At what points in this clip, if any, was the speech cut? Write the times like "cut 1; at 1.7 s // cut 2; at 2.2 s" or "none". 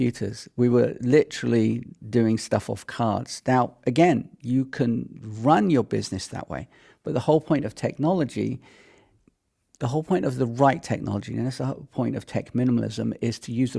none